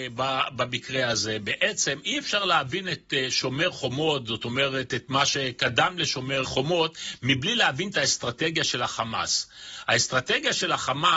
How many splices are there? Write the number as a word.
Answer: one